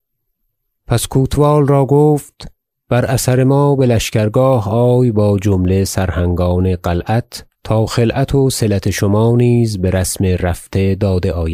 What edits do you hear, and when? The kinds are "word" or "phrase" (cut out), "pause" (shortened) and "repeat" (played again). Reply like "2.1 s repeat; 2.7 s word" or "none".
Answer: 7.5 s pause